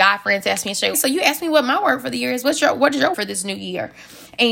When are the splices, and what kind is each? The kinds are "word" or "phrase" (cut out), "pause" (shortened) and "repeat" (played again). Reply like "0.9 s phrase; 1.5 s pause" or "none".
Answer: 0.9 s word; 3.1 s word